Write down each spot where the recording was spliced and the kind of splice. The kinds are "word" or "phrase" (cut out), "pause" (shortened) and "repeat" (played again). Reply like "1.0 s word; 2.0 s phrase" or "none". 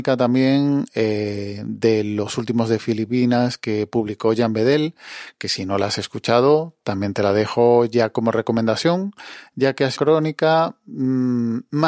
10.0 s word

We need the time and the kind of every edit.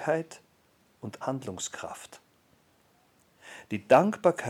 1.2 s word

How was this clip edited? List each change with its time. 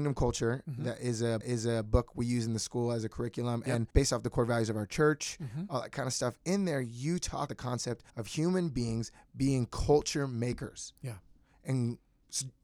1.4 s repeat; 3.9 s pause; 7.5 s word; 8.1 s pause

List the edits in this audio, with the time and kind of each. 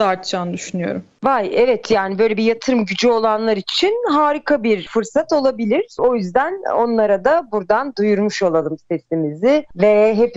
none

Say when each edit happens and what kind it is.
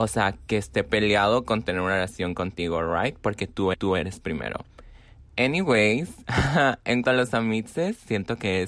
3.7 s repeat; 7.0 s word

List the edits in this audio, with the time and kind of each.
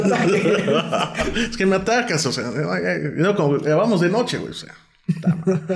none

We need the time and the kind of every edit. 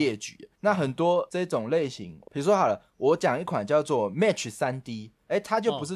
2.3 s pause

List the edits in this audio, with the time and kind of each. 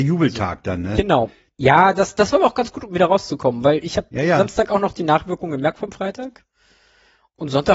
none

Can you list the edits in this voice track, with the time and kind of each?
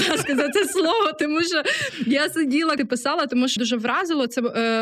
2.8 s word; 3.6 s phrase

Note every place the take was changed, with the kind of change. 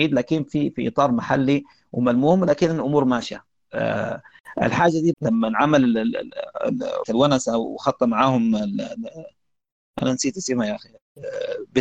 5.1 s word; 7.0 s word

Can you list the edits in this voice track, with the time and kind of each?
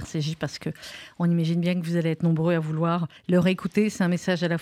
3.2 s pause

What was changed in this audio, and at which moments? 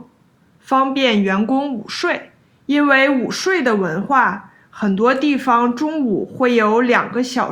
2.4 s pause

